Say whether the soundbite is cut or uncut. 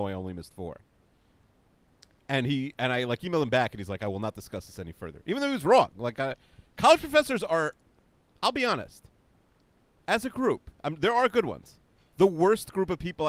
uncut